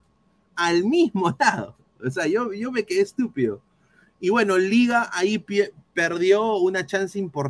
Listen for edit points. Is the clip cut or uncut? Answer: uncut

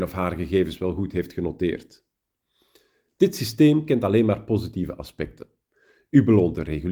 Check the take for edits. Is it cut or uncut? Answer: uncut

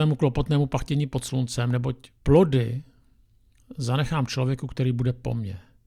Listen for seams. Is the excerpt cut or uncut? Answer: cut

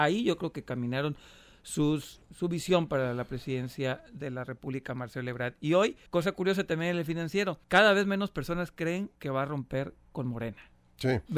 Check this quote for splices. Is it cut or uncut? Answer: cut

